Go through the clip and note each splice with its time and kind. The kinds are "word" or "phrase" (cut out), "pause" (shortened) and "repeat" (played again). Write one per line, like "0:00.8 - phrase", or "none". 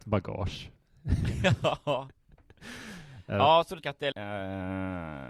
0:03.8 - word
0:04.1 - word